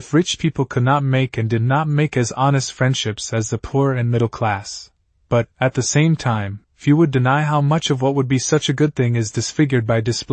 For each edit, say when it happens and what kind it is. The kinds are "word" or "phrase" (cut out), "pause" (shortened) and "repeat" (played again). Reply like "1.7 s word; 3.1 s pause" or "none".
5.5 s pause; 6.6 s pause